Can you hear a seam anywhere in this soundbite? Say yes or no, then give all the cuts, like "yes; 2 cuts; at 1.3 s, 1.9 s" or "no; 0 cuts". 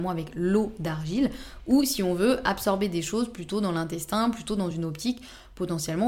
no; 0 cuts